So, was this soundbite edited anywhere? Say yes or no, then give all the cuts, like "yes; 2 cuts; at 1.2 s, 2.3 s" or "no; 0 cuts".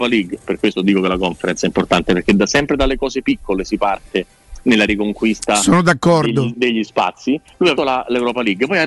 yes; 2 cuts; at 6.5 s, 7.8 s